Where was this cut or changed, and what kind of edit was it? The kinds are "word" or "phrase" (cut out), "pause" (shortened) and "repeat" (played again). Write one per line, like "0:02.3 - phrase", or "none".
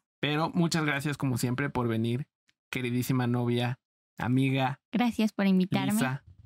none